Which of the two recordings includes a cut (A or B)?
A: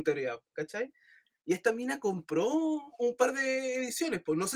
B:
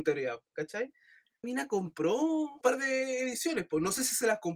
B